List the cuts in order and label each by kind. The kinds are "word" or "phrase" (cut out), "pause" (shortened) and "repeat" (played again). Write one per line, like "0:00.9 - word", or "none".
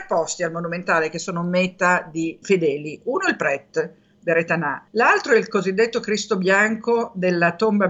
0:02.4 - word
0:04.9 - pause